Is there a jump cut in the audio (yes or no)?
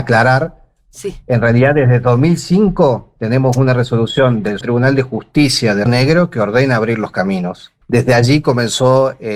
yes